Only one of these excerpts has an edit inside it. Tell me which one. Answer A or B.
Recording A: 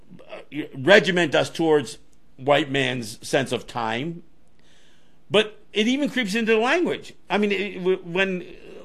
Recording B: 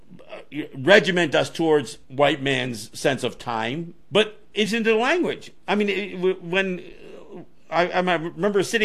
B